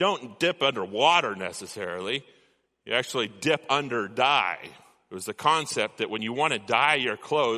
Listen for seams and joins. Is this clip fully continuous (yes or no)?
yes